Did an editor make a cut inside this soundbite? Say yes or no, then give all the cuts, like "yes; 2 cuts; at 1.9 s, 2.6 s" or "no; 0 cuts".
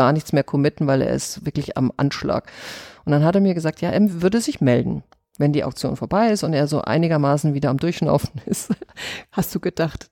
no; 0 cuts